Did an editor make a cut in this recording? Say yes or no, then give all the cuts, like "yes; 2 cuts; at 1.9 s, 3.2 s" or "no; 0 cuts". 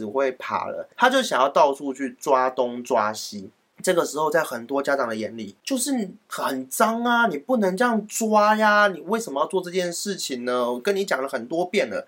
no; 0 cuts